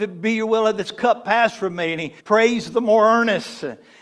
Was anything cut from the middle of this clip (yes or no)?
yes